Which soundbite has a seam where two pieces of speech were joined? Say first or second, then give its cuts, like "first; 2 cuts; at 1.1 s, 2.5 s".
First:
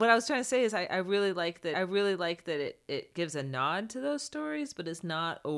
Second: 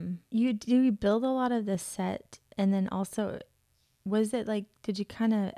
first; 1 cut; at 1.7 s